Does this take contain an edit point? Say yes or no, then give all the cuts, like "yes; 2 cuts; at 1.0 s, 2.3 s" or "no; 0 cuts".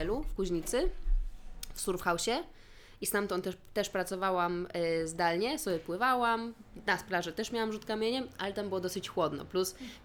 no; 0 cuts